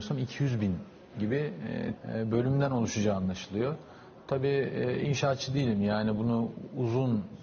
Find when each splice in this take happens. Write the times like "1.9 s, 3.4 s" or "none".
2.0 s